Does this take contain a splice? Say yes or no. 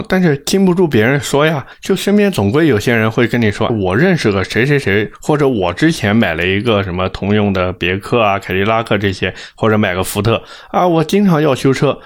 yes